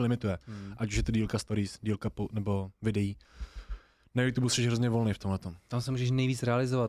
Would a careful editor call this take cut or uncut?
uncut